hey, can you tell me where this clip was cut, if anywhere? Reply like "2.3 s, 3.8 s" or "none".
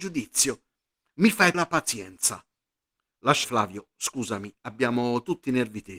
1.5 s, 3.4 s

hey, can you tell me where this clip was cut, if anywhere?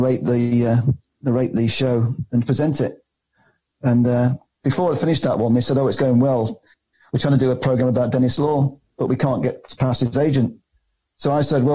none

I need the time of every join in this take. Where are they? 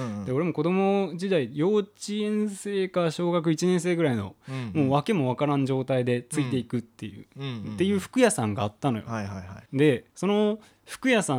9.7 s, 10.1 s

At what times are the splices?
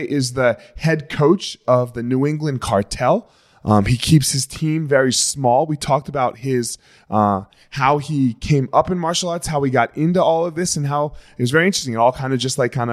none

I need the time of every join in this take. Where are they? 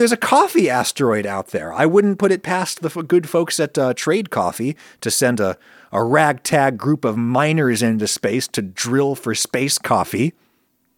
none

